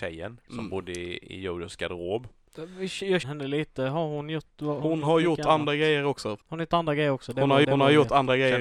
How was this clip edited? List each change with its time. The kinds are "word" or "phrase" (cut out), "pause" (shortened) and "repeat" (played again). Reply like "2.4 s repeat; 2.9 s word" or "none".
3.2 s phrase; 4.8 s word; 6.4 s pause; 7.6 s repeat